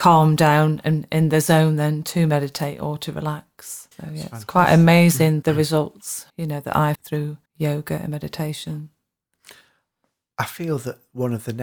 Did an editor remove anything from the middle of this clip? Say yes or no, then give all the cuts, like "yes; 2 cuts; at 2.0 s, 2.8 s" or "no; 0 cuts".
yes; 5 cuts; at 3.9 s, 5.4 s, 6.3 s, 6.9 s, 7.5 s